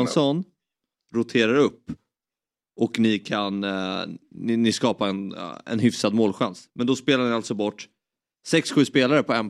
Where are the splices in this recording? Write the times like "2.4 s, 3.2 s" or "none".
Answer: none